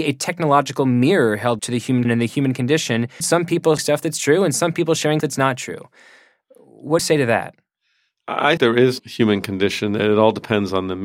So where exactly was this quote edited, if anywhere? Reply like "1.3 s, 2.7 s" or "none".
1.6 s, 2.0 s, 3.2 s, 3.8 s, 5.2 s, 7.0 s, 8.6 s, 9.0 s